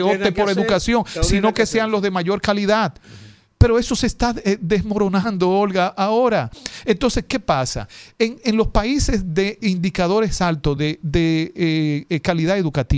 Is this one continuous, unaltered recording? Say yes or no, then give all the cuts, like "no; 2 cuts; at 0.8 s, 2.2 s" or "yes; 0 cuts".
yes; 0 cuts